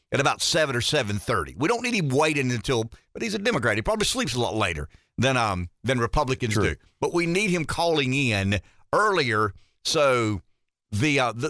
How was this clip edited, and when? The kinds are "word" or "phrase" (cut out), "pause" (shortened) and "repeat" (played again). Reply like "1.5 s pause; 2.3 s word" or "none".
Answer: none